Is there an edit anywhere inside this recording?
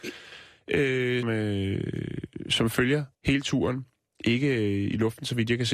yes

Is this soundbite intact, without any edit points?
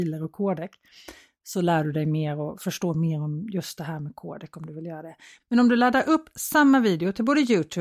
yes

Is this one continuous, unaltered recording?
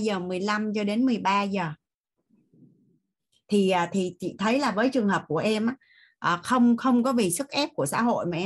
yes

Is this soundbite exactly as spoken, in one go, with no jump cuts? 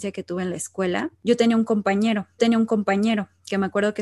no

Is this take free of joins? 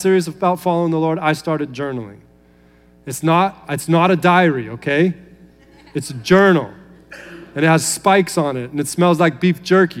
yes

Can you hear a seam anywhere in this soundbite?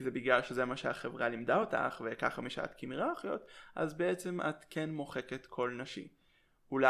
no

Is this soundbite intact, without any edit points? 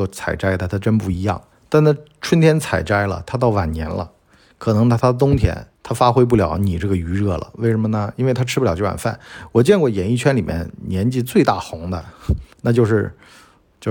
no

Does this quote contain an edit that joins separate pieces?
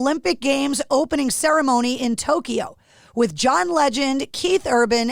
no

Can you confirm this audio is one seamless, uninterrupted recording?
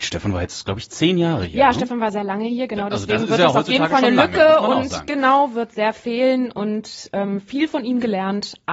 yes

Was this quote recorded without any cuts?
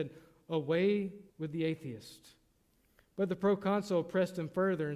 no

